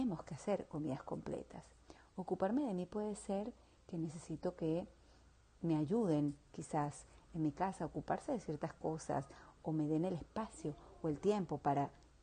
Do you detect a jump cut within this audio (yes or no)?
no